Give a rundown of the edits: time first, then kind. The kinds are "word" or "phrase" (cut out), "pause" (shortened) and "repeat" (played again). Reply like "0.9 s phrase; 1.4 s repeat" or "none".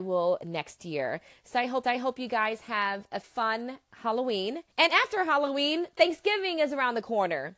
1.8 s repeat; 3.2 s word; 4.7 s pause

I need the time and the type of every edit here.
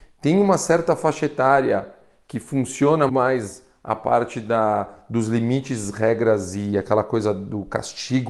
3.1 s word

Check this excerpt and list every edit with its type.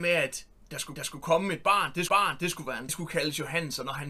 1.0 s repeat; 2.1 s repeat; 2.9 s phrase

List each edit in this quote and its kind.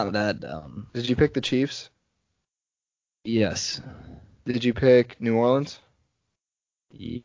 none

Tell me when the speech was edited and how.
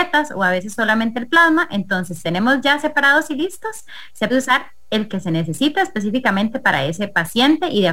2.2 s word; 4.3 s word

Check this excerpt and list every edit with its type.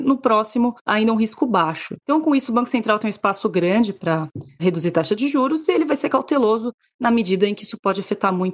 2.0 s pause

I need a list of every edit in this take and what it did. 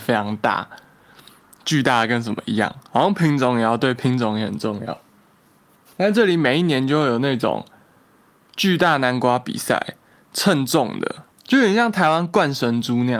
11.3 s pause

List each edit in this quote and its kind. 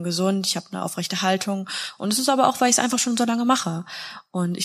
none

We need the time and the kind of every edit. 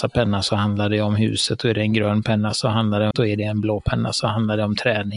3.1 s word

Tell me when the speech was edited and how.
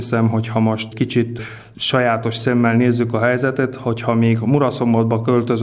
0.9 s word

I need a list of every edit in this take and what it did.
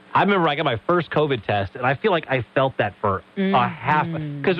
3.3 s pause

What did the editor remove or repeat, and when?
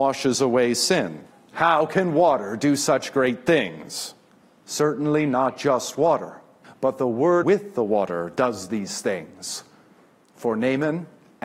1.3 s pause; 4.3 s pause; 6.6 s pause; 7.4 s phrase

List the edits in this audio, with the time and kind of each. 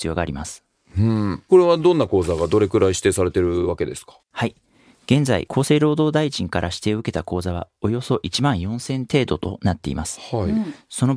4.2 s pause

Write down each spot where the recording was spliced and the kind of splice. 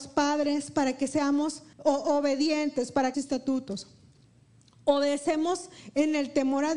1.7 s pause; 3.1 s phrase

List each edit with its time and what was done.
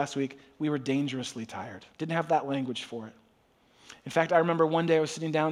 1.9 s pause

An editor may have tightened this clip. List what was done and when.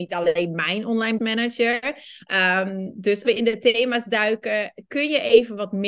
1.2 s word; 3.2 s word

